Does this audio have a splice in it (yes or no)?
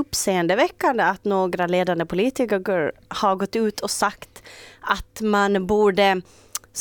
no